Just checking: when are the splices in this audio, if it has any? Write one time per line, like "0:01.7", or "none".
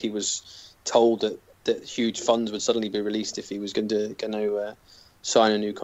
none